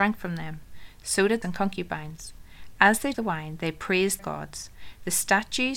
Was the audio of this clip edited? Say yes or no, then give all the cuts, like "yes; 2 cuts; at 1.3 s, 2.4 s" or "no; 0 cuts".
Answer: yes; 3 cuts; at 1.4 s, 3.1 s, 4.2 s